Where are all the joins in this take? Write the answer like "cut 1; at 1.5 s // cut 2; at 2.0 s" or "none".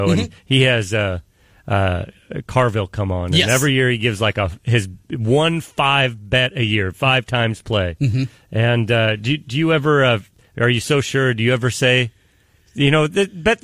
none